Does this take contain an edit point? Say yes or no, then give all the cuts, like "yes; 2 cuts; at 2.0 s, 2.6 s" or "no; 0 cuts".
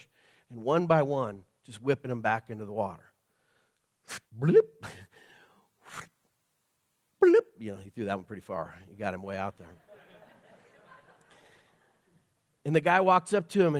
yes; 1 cut; at 4.3 s